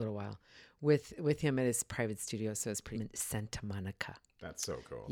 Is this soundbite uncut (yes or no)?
no